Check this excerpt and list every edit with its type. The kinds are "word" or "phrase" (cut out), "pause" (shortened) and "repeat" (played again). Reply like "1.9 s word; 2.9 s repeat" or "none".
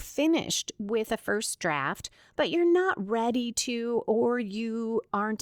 none